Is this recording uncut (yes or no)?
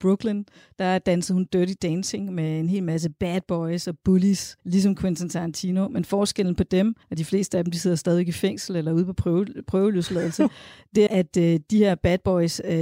no